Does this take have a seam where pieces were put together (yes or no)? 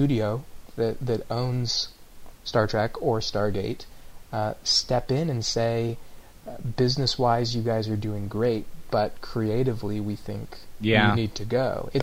no